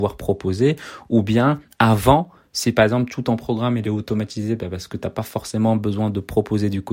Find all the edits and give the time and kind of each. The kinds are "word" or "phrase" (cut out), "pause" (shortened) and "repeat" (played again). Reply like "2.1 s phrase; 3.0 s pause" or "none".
none